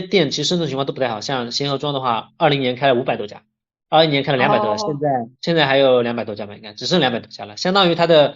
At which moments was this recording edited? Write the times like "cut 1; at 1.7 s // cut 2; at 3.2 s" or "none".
cut 1; at 5.3 s